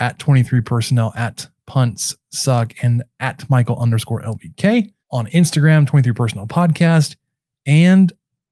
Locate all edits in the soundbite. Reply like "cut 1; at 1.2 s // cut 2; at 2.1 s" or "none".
cut 1; at 5.0 s